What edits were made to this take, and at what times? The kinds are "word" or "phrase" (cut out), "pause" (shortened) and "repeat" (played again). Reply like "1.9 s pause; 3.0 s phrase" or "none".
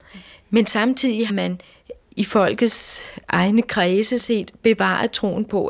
1.3 s word; 2.0 s pause; 3.2 s pause; 4.2 s word